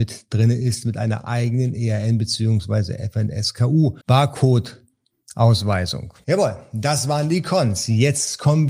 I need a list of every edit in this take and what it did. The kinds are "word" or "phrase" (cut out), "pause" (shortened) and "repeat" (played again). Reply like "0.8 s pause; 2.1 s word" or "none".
4.0 s pause